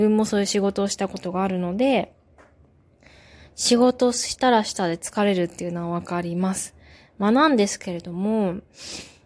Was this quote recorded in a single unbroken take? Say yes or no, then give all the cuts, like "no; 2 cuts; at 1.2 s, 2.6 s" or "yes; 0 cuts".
yes; 0 cuts